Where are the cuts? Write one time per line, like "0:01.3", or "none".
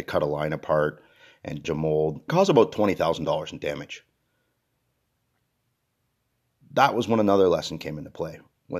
0:01.6
0:02.3